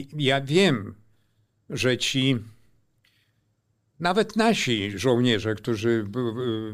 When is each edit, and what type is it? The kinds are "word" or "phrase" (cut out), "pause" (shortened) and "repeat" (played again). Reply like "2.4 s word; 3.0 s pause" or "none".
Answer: none